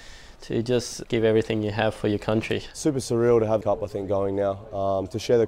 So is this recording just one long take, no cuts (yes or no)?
no